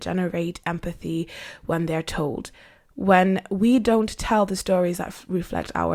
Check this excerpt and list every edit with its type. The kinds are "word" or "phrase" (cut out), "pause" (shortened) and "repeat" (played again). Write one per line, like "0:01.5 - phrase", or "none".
none